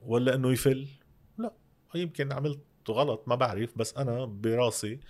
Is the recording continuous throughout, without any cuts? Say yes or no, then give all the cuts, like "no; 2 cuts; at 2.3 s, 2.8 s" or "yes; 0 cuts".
yes; 0 cuts